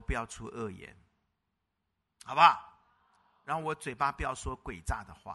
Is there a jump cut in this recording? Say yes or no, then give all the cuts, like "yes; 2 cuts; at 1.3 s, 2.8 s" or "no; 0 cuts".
no; 0 cuts